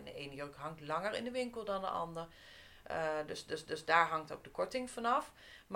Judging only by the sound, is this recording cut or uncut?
cut